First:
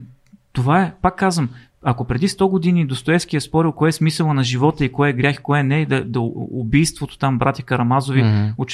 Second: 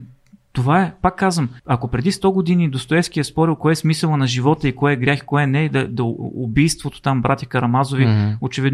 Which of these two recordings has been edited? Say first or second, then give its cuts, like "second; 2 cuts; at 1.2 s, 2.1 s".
second; 1 cut; at 1.6 s